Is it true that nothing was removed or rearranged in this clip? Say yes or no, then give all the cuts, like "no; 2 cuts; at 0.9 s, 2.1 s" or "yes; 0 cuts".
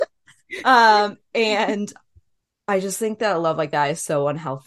yes; 0 cuts